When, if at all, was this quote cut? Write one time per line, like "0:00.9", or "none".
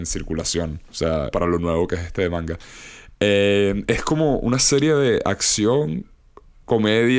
0:01.3